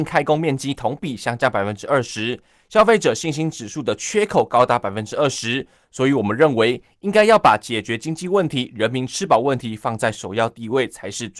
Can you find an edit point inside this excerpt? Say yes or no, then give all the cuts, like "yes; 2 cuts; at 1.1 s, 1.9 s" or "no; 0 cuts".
no; 0 cuts